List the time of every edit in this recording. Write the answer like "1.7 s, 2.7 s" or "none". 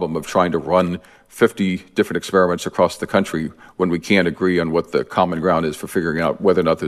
none